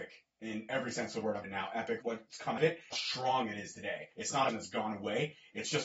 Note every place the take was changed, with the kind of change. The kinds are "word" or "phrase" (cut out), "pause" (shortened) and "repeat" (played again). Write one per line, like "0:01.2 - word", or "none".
0:01.4 - phrase
0:02.0 - phrase
0:02.6 - word
0:02.9 - phrase
0:04.1 - pause
0:04.5 - phrase

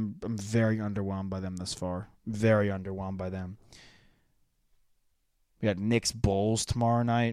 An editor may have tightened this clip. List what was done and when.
none

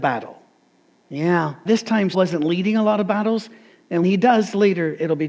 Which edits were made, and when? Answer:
0:01.7 - word
0:02.1 - word
0:04.0 - word

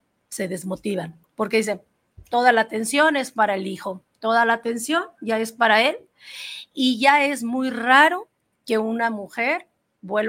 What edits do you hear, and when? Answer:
none

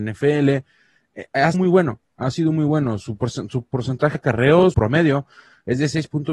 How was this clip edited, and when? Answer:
0:01.5 - word
0:04.1 - word
0:04.7 - word

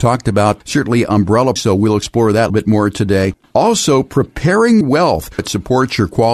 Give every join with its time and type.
0:01.6 - word
0:02.5 - word
0:04.8 - word
0:05.4 - word

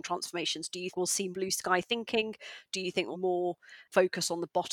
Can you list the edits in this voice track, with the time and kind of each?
0:00.9 - word
0:01.3 - word
0:03.1 - word

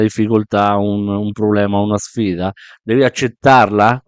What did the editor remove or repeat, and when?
none

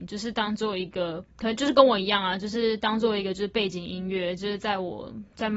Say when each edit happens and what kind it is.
0:01.3 - pause

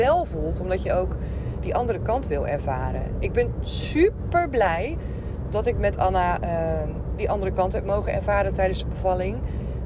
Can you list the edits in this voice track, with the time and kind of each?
none

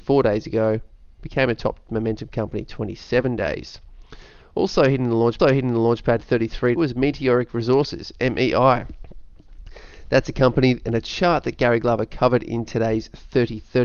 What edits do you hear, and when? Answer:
0:05.4 - repeat
0:06.8 - phrase

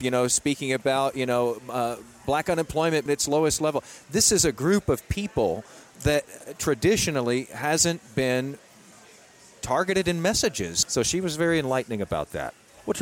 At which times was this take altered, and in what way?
0:03.1 - word

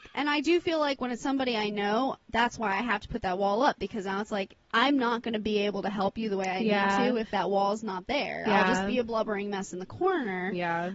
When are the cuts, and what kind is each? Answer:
none

